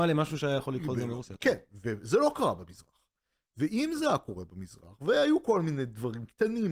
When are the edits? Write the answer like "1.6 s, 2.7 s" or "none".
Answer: none